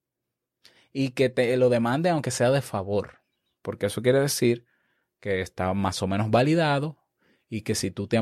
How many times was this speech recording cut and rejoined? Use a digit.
0